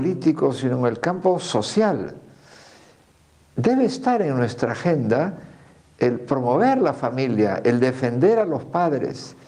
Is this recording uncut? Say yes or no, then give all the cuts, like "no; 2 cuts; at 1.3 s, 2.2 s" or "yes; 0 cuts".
yes; 0 cuts